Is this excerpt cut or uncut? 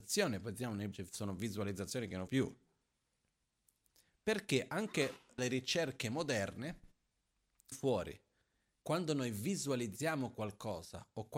cut